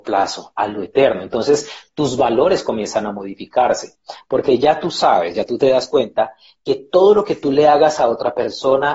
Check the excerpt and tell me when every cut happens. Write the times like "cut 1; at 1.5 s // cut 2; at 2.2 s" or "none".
none